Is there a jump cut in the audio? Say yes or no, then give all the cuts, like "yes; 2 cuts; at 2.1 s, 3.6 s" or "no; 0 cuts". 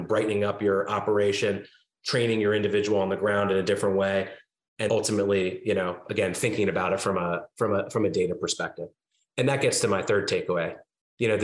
yes; 1 cut; at 4.9 s